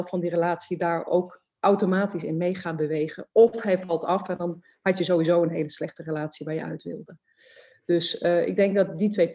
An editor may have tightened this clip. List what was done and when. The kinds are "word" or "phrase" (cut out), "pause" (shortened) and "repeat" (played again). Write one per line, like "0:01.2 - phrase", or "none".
none